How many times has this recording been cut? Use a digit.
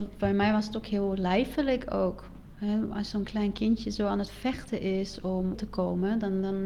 1